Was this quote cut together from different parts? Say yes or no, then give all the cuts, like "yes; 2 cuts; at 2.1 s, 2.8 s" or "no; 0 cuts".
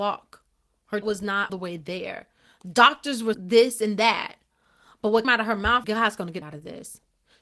yes; 6 cuts; at 1.0 s, 1.5 s, 3.3 s, 5.2 s, 5.8 s, 6.4 s